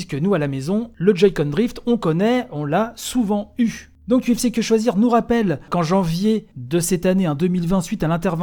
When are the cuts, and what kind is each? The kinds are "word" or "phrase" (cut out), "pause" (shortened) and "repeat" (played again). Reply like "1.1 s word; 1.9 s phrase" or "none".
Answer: none